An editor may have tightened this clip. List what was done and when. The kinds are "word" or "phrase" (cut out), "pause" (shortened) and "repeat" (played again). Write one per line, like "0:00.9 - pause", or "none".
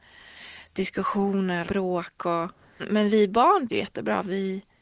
0:01.6 - word
0:02.8 - word
0:03.7 - word

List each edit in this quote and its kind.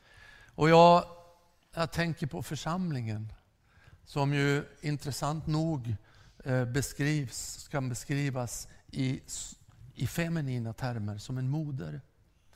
none

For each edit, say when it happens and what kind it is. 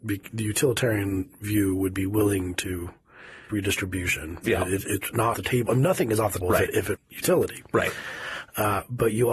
0:03.5 - word
0:05.3 - word
0:06.4 - word
0:07.0 - word

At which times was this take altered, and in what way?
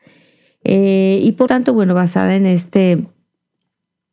0:01.5 - word

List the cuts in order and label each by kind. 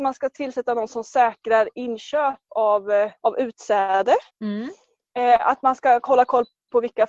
0:03.2 - pause
0:04.3 - pause

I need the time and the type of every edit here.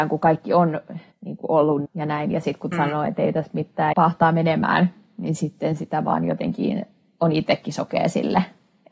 0:01.1 - pause
0:01.9 - phrase
0:02.7 - word
0:03.9 - word

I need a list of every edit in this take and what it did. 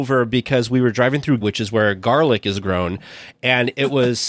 0:01.4 - word

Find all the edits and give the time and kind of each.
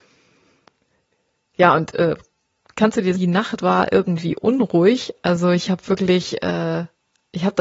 0:03.1 - phrase

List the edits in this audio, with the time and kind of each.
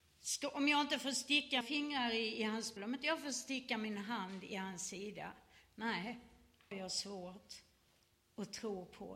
0:01.6 - word
0:02.8 - word
0:06.7 - word

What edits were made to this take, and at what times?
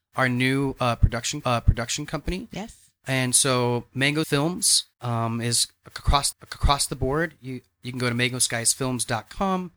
0:01.4 - repeat
0:04.2 - word
0:04.9 - pause
0:06.3 - repeat

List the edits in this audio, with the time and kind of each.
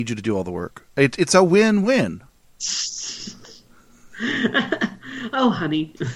0:02.3 - pause

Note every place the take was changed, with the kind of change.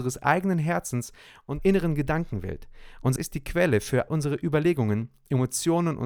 0:01.6 - word
0:03.2 - word
0:04.1 - word

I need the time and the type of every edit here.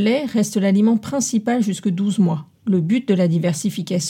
0:02.5 - pause

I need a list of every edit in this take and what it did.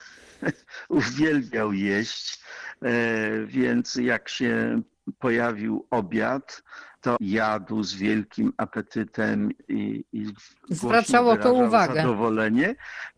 0:07.2 - phrase

